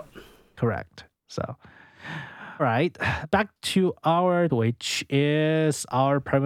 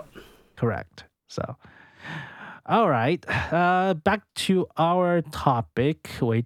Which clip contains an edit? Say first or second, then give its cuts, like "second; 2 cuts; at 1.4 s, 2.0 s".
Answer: first; 3 cuts; at 2.6 s, 3.2 s, 4.5 s